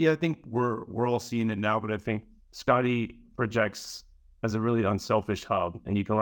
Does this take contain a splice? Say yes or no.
no